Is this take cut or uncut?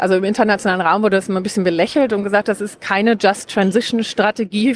uncut